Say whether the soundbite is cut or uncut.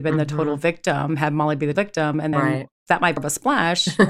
cut